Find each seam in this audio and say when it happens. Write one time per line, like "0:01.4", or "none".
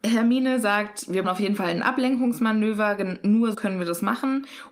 0:01.2
0:03.5